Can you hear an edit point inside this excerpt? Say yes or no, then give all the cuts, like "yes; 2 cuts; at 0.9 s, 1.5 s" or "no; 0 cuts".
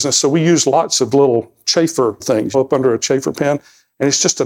yes; 3 cuts; at 1.1 s, 2.2 s, 2.5 s